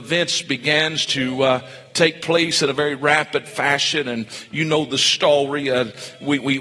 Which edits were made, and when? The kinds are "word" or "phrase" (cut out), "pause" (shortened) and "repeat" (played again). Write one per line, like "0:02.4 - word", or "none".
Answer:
none